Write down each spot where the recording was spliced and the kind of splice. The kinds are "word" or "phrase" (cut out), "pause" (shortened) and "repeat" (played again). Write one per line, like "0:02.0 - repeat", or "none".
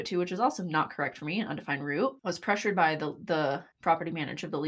0:02.2 - pause
0:03.7 - pause